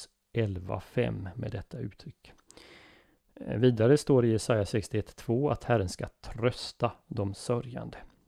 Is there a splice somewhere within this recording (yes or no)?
no